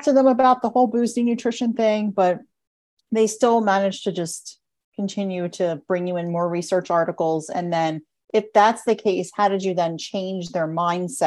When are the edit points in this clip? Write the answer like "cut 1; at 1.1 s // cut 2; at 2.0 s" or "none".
none